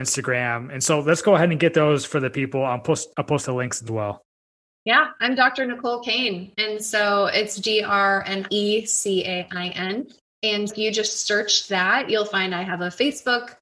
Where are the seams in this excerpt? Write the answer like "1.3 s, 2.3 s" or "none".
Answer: 3.9 s, 4.5 s, 8.5 s, 10.7 s